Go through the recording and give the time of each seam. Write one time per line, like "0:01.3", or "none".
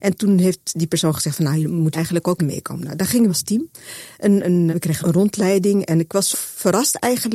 0:01.9
0:02.4
0:03.3
0:04.7
0:05.0
0:06.3